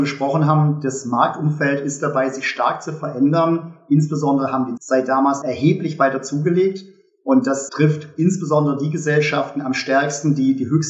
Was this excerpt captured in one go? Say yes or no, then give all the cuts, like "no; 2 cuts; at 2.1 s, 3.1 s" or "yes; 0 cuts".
no; 3 cuts; at 4.8 s, 5.4 s, 7.7 s